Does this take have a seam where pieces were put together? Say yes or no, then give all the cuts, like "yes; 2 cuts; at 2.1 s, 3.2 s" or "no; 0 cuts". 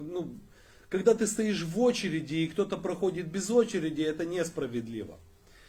no; 0 cuts